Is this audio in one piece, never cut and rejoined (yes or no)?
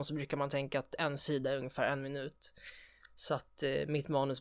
yes